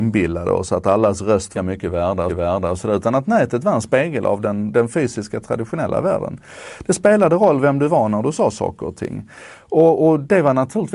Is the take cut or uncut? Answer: cut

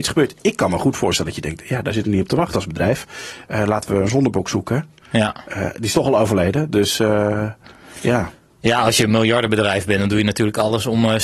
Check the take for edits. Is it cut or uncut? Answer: uncut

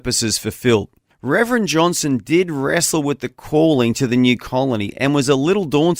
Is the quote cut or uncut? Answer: cut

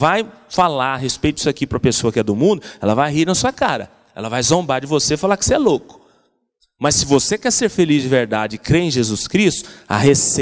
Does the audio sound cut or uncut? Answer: uncut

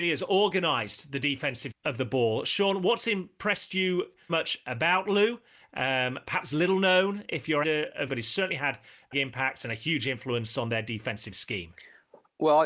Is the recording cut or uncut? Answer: cut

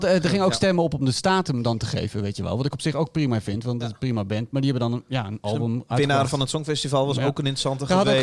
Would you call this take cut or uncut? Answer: uncut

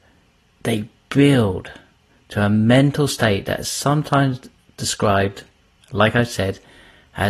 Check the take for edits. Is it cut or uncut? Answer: uncut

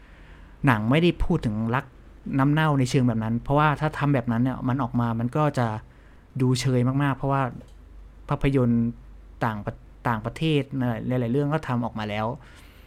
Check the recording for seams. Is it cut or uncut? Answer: uncut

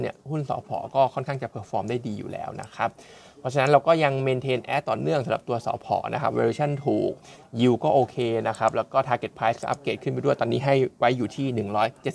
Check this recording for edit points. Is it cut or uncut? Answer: uncut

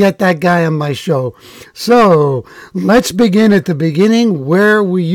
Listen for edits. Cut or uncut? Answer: uncut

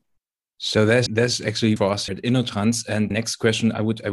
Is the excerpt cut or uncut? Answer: cut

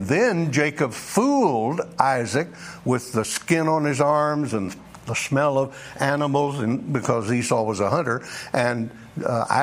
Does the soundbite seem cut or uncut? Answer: uncut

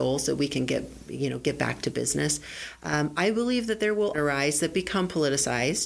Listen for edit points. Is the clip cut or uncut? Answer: cut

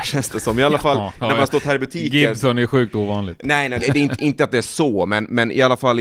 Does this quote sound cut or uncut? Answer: cut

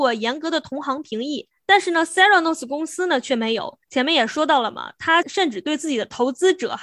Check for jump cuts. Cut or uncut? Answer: cut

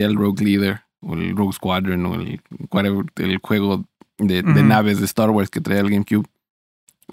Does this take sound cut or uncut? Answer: uncut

